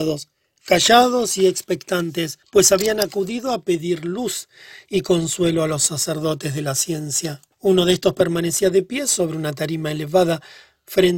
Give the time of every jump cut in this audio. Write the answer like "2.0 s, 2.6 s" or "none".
2.4 s, 7.5 s